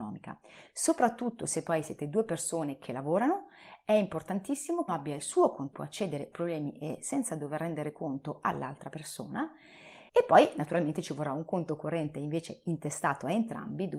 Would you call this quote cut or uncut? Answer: cut